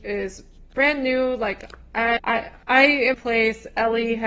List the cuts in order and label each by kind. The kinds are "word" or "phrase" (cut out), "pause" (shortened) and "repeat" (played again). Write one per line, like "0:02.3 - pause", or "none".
0:02.2 - word
0:02.6 - pause
0:03.1 - phrase